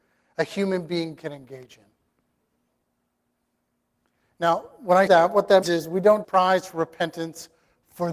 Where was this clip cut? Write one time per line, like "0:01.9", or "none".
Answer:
0:05.1
0:05.6
0:06.2